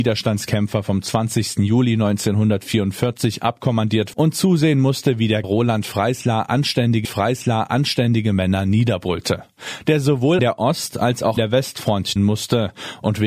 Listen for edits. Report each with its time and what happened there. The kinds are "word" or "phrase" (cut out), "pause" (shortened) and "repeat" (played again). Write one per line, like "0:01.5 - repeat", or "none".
0:04.1 - word
0:05.4 - word
0:07.0 - repeat
0:10.4 - word
0:11.4 - word
0:12.2 - word